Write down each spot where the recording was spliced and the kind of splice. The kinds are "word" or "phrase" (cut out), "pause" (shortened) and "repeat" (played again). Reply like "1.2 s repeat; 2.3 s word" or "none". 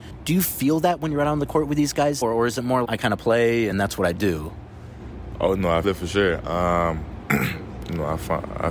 2.2 s word; 2.8 s word; 3.7 s phrase; 5.8 s word